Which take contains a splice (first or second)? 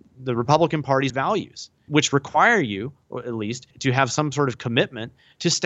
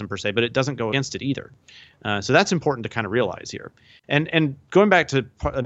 first